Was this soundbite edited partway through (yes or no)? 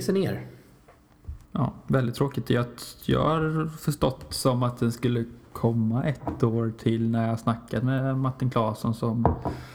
yes